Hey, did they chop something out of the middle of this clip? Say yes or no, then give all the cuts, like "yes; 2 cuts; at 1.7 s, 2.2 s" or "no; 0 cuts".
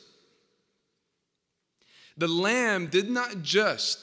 no; 0 cuts